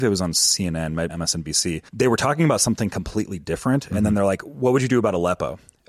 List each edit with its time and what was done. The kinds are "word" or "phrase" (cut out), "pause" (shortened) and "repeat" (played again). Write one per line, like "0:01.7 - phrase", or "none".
0:01.1 - phrase
0:01.9 - pause